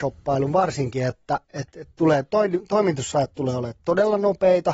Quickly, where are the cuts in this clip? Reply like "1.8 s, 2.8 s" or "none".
1.4 s